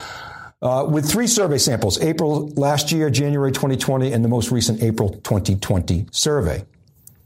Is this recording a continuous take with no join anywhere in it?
yes; 0 cuts

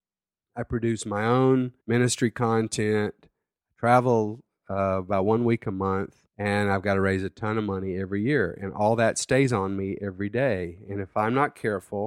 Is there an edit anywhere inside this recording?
yes; 2 cuts; at 1.8 s, 6.3 s

